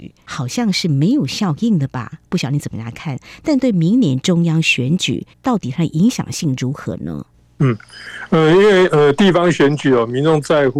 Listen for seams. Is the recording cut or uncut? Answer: cut